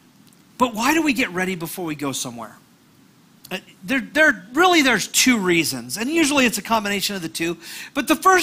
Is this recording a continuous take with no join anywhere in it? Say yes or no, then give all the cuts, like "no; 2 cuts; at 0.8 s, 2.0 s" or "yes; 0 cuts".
yes; 0 cuts